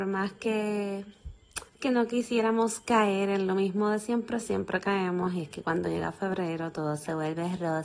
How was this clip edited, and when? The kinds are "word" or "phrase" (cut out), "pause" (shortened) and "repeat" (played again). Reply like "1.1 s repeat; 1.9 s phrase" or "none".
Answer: 1.7 s pause